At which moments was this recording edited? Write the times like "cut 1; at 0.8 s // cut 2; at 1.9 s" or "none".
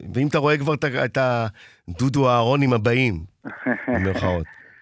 none